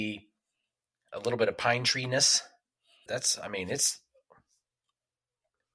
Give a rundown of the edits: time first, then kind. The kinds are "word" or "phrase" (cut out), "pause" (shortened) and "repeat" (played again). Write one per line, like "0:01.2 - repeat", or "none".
0:03.1 - word